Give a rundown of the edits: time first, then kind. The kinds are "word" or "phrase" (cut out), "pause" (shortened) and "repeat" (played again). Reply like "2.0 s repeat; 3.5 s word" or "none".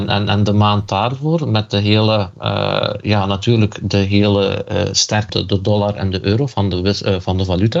5.3 s phrase